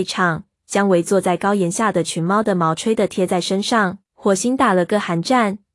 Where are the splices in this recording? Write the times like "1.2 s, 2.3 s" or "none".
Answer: 4.0 s